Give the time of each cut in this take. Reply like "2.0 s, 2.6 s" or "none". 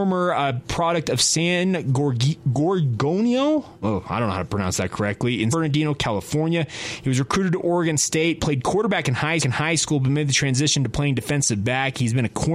5.5 s, 9.4 s